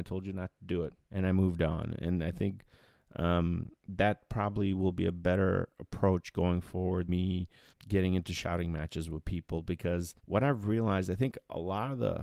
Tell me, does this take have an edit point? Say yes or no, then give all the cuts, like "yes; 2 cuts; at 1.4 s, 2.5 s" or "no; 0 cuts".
yes; 5 cuts; at 1.0 s, 3.8 s, 7.1 s, 7.7 s, 10.2 s